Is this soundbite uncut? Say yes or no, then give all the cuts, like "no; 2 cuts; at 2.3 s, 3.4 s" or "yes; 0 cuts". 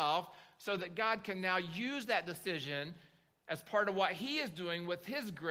yes; 0 cuts